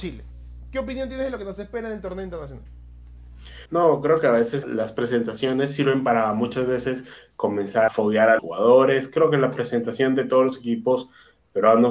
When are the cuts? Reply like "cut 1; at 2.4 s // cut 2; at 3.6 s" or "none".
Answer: cut 1; at 3.7 s // cut 2; at 4.6 s // cut 3; at 7.9 s // cut 4; at 8.4 s